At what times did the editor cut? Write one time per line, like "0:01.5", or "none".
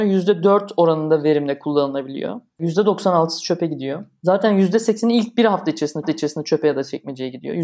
0:06.0